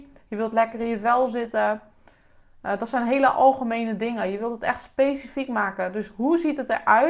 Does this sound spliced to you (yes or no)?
no